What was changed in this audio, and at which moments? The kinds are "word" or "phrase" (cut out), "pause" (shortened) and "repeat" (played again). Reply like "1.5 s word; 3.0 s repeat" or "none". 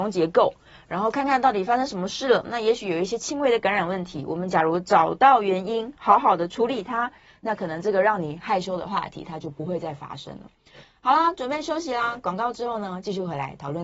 none